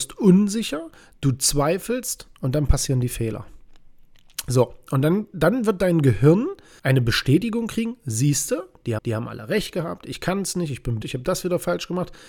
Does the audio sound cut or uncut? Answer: cut